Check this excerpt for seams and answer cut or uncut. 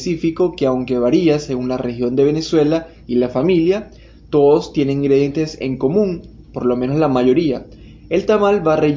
uncut